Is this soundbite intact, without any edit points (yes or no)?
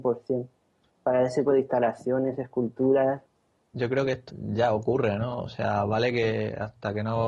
no